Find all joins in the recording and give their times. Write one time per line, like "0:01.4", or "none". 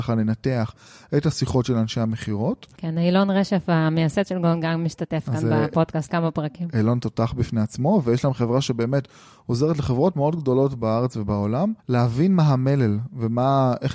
0:06.1
0:11.8